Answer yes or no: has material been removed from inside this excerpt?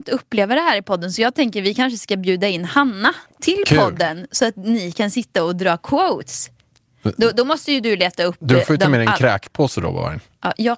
yes